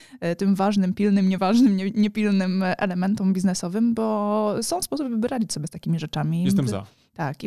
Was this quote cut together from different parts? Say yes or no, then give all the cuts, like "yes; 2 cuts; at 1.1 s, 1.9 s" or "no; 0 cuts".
no; 0 cuts